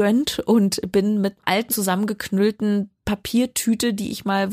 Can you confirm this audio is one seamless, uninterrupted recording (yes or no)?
no